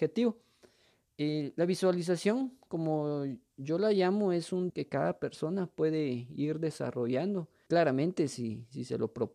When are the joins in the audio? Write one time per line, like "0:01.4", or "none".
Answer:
0:04.7
0:07.7